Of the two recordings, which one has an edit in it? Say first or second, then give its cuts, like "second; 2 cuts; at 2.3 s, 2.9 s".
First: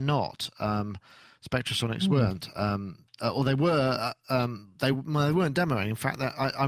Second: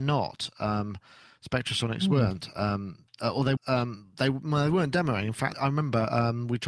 second; 2 cuts; at 3.6 s, 5.5 s